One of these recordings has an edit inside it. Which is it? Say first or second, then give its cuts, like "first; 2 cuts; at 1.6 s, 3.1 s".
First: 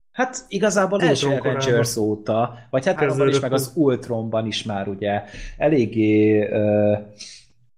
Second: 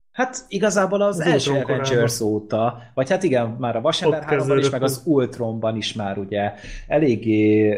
first; 2 cuts; at 1.0 s, 3.0 s